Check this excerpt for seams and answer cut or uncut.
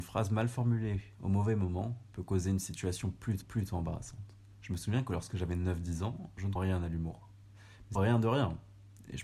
cut